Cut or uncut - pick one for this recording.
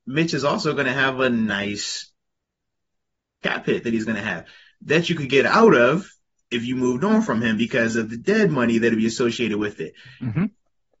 uncut